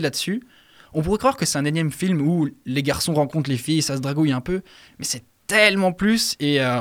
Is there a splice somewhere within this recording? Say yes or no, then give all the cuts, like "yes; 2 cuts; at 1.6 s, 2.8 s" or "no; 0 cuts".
no; 0 cuts